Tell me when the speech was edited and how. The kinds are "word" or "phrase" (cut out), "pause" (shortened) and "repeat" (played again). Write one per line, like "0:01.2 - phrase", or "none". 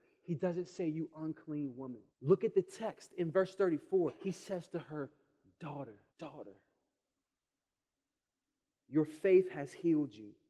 0:02.1 - pause
0:04.2 - pause
0:06.1 - pause